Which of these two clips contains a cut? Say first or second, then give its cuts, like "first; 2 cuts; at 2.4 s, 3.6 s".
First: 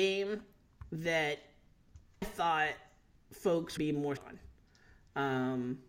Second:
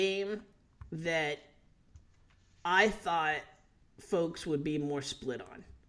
first; 3 cuts; at 2.2 s, 3.8 s, 4.2 s